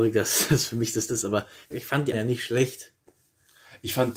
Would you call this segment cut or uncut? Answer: cut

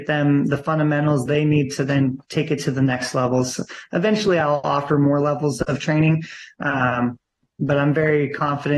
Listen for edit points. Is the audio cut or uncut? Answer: uncut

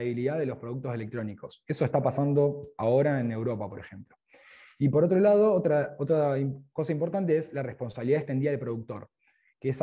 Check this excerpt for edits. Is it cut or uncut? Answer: uncut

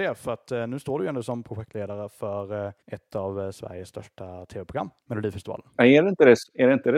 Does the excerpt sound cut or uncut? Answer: cut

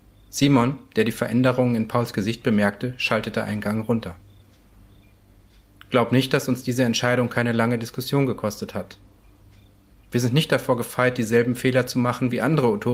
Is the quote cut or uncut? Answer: uncut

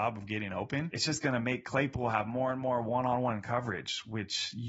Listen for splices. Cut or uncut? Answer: uncut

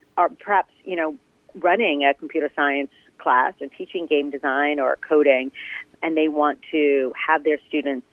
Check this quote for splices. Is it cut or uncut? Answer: uncut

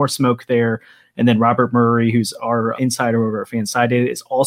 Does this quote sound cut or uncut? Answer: cut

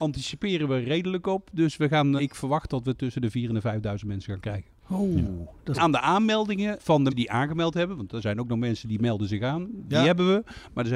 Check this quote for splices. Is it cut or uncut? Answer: cut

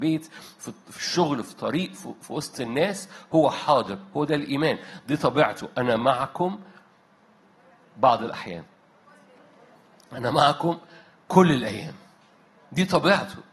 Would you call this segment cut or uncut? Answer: uncut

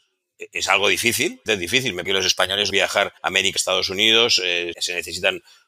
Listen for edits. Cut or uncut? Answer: cut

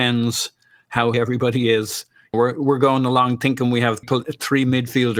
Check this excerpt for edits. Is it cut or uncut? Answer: cut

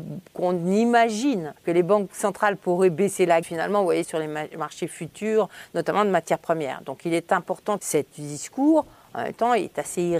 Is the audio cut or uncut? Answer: cut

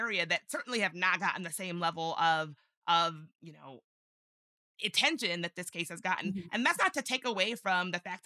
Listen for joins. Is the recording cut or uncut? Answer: uncut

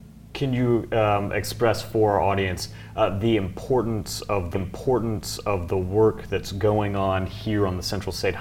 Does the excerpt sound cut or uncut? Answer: cut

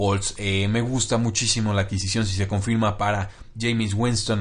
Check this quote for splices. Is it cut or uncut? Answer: uncut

